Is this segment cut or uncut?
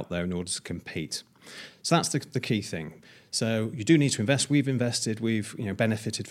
cut